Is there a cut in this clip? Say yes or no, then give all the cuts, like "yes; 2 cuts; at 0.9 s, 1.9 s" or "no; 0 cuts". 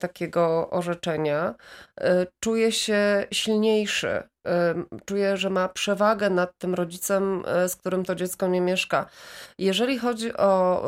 no; 0 cuts